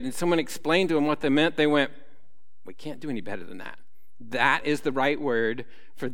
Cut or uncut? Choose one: uncut